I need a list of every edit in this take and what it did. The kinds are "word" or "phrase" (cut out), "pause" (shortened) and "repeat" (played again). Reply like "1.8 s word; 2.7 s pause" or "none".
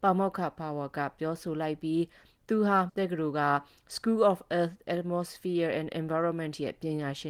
2.9 s word